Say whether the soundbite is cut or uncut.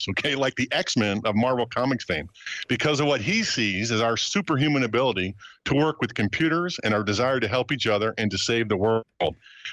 uncut